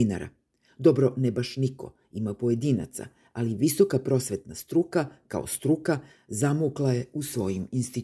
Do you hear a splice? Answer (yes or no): no